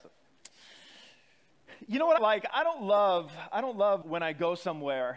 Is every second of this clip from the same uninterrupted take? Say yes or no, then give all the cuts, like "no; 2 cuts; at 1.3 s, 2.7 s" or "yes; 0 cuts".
no; 3 cuts; at 2.2 s, 2.5 s, 4.0 s